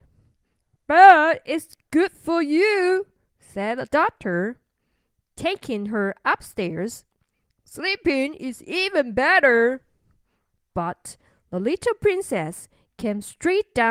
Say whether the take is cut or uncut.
uncut